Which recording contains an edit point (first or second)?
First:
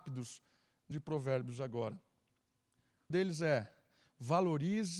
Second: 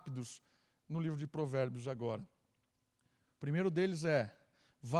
first